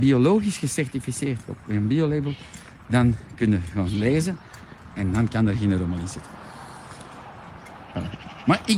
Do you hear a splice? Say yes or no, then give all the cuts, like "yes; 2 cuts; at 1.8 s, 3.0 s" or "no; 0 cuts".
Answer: no; 0 cuts